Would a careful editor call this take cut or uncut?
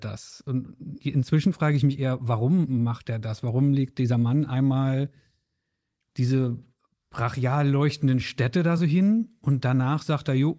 uncut